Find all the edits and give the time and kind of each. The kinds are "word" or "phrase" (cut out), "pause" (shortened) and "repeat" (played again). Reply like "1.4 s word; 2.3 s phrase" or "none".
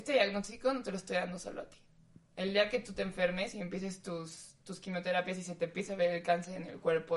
none

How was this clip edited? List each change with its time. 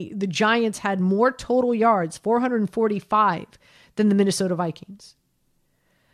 none

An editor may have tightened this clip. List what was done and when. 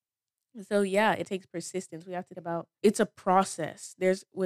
1.2 s word; 2.3 s word

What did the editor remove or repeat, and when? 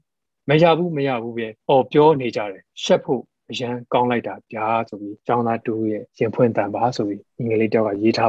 1.6 s pause; 2.7 s pause; 5.2 s pause; 6.1 s pause

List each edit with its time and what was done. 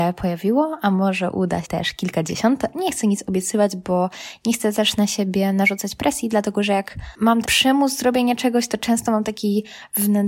1.6 s word; 2.7 s word; 7.4 s word

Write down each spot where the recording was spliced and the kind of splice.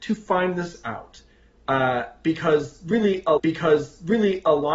3.4 s repeat

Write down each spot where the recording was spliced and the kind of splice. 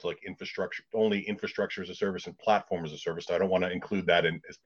3.3 s phrase

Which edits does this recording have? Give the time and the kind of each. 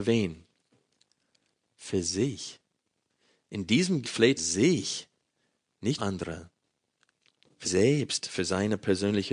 4.0 s word; 4.4 s phrase; 6.0 s word; 7.6 s word

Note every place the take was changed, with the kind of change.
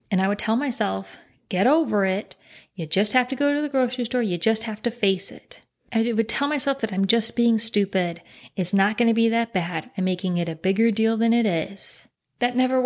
none

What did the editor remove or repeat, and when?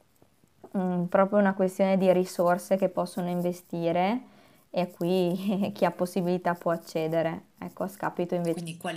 none

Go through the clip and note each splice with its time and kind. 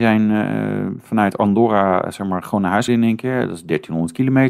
2.9 s word

